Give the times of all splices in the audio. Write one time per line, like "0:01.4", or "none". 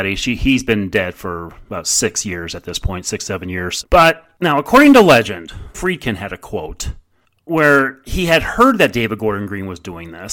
0:05.7